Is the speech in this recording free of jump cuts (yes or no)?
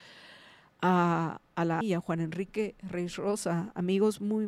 no